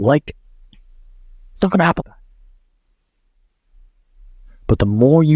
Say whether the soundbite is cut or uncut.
cut